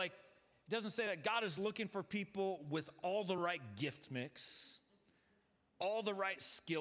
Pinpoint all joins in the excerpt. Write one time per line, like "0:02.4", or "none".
none